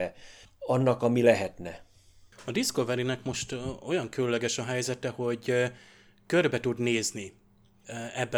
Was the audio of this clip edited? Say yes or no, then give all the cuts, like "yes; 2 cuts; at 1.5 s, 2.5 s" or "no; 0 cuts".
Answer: no; 0 cuts